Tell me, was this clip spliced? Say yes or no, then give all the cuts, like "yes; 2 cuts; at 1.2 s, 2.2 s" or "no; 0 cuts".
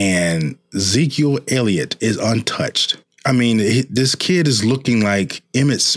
yes; 1 cut; at 3.0 s